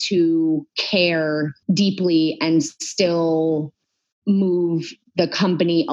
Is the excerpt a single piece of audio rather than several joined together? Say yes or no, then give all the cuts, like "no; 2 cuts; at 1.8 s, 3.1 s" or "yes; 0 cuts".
yes; 0 cuts